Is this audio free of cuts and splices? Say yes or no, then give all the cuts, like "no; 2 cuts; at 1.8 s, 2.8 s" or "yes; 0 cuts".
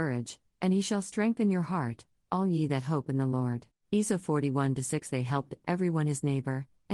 no; 1 cut; at 3.7 s